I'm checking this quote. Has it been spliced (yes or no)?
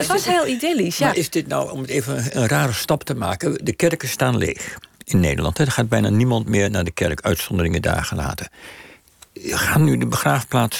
no